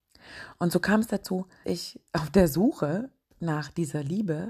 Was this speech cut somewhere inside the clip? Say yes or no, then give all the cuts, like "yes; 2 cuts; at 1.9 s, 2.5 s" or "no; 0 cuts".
yes; 1 cut; at 1.6 s